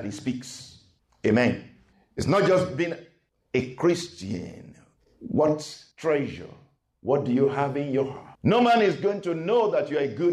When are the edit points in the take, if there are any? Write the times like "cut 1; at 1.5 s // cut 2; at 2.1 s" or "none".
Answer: cut 1; at 5.9 s // cut 2; at 8.3 s